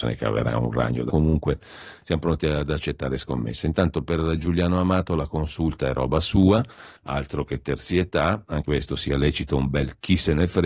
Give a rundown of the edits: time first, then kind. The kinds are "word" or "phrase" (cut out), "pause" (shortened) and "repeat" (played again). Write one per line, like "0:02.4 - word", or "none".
0:01.1 - word
0:07.0 - pause
0:08.6 - word